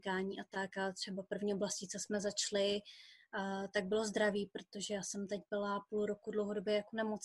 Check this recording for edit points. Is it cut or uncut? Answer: uncut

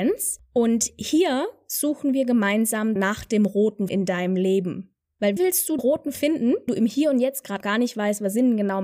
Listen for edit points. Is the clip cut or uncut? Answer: cut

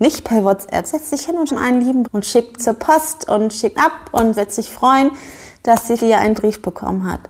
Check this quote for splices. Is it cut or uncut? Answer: cut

